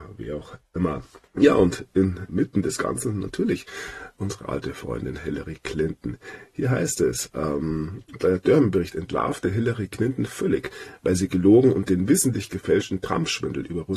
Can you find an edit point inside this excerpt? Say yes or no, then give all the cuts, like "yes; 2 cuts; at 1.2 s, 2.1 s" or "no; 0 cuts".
yes; 1 cut; at 1.3 s